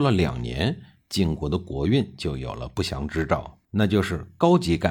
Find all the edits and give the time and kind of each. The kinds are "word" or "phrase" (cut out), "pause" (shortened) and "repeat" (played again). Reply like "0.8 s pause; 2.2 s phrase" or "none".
3.6 s pause